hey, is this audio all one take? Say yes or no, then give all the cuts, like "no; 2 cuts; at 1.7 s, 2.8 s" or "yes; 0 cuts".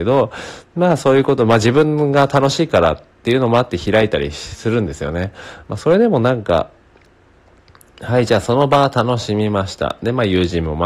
yes; 0 cuts